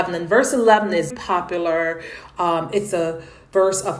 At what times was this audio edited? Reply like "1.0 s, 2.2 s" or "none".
1.1 s, 2.9 s